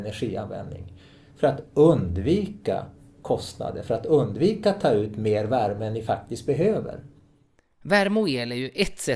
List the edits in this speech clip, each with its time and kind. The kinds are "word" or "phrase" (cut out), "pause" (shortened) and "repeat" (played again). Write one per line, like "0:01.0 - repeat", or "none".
none